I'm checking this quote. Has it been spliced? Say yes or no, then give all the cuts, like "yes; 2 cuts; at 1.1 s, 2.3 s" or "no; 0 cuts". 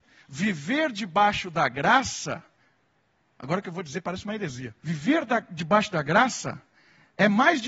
yes; 1 cut; at 4.8 s